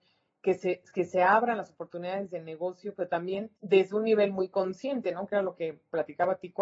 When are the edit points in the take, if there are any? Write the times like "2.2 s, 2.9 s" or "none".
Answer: 3.6 s